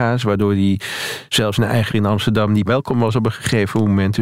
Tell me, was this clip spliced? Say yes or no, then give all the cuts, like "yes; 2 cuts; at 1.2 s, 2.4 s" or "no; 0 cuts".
yes; 3 cuts; at 1.5 s, 1.9 s, 2.6 s